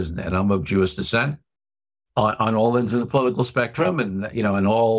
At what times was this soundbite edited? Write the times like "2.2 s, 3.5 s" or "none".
none